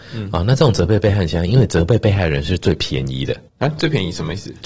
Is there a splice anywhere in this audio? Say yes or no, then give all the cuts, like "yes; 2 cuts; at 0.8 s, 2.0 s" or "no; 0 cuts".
yes; 1 cut; at 3.5 s